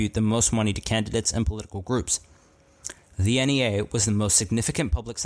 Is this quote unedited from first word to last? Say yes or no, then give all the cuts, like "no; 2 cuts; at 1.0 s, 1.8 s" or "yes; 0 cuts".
yes; 0 cuts